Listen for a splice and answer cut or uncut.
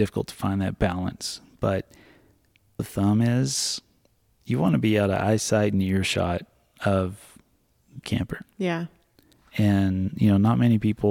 cut